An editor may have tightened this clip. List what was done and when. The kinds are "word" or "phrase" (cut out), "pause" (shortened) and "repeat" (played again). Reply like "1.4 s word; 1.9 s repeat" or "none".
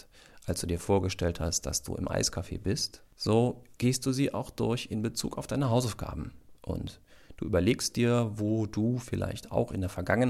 6.6 s pause